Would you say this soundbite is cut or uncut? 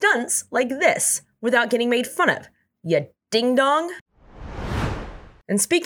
uncut